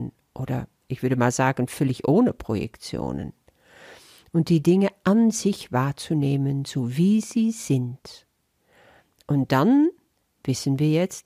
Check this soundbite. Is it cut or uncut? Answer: uncut